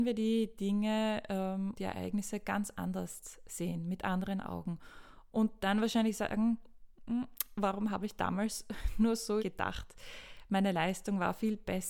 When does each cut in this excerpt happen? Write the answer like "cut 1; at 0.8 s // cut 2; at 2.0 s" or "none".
cut 1; at 1.8 s // cut 2; at 9.4 s